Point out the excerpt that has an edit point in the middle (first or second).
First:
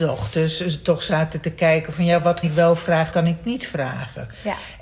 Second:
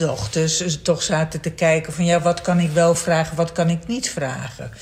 first